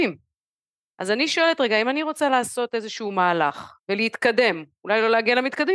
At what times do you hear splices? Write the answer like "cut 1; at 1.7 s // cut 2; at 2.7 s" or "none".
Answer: cut 1; at 3.8 s